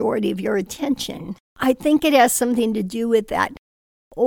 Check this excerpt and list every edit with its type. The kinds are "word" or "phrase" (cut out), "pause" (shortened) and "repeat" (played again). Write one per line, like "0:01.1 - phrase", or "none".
0:01.5 - pause